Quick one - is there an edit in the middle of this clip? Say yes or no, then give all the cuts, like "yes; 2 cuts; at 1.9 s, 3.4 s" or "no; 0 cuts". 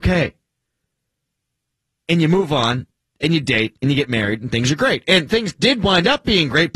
no; 0 cuts